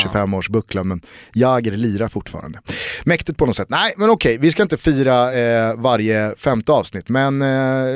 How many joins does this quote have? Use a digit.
0